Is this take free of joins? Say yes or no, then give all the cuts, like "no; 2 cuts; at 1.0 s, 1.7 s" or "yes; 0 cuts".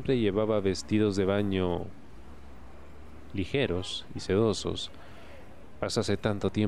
yes; 0 cuts